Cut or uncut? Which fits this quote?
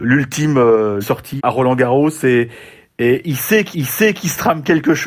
cut